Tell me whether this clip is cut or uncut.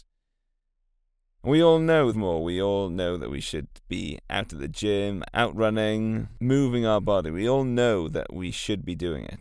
cut